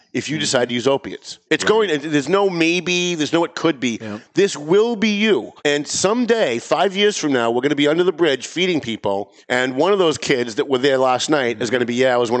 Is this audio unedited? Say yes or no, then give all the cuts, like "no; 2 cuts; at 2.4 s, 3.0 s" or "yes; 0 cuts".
no; 3 cuts; at 1.5 s, 5.6 s, 9.4 s